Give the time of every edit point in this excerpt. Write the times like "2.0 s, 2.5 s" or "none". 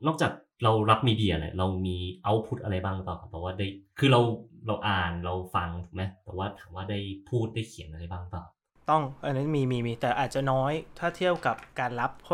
none

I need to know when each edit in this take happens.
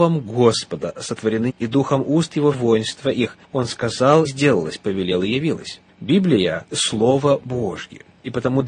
1.5 s, 2.5 s, 3.4 s, 4.3 s, 6.7 s

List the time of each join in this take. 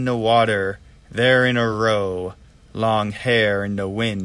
none

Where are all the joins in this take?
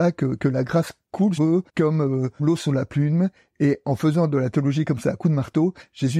1.4 s, 1.7 s, 2.4 s

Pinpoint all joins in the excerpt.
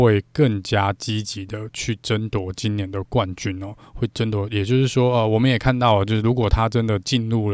none

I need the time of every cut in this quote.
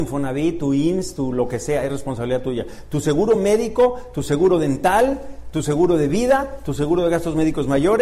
none

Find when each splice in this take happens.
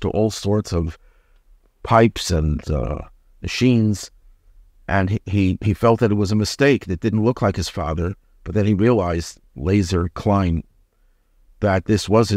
none

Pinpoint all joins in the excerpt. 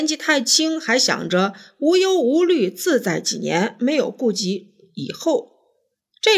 none

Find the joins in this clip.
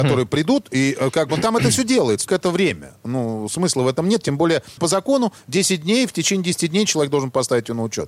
2.3 s, 3.0 s, 4.8 s

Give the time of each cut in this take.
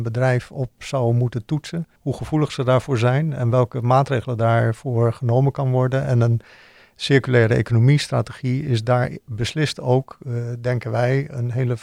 2.0 s

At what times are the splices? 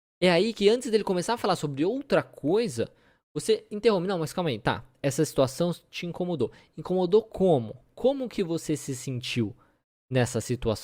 none

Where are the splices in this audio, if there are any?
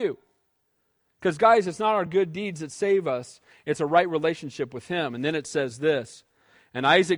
none

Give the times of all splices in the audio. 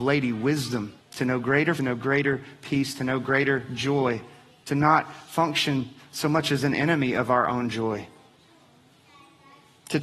1.0 s, 1.8 s

